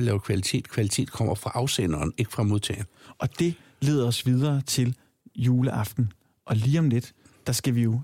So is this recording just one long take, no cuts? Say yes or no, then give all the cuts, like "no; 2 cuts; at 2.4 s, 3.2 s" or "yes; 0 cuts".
yes; 0 cuts